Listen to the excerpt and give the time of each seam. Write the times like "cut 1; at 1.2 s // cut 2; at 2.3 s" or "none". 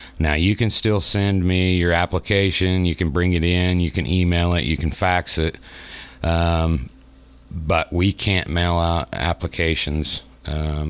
none

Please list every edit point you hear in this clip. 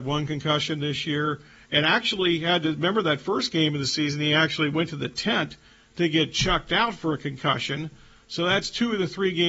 none

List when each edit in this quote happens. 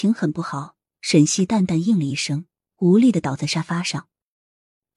none

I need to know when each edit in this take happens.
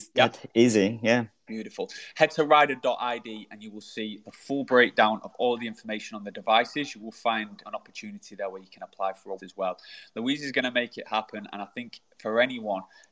cut 1; at 7.6 s // cut 2; at 9.4 s

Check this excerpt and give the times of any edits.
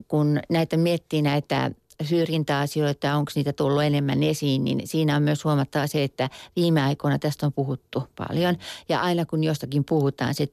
none

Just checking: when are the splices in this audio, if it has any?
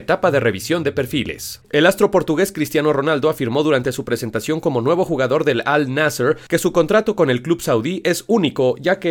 cut 1; at 1.6 s

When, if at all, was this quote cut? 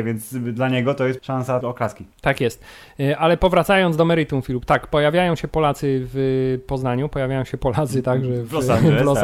cut 1; at 1.2 s // cut 2; at 1.6 s // cut 3; at 2.1 s

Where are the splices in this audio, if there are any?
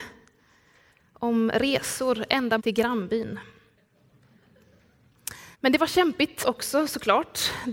cut 1; at 2.6 s // cut 2; at 5.5 s // cut 3; at 6.4 s

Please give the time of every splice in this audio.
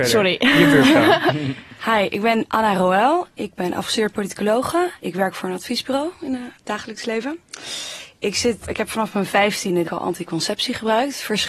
cut 1; at 5.0 s // cut 2; at 8.6 s // cut 3; at 9.8 s

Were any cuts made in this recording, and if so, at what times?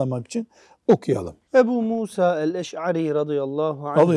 cut 1; at 1.4 s

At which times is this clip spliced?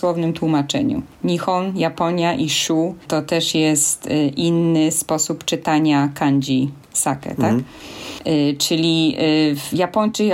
none

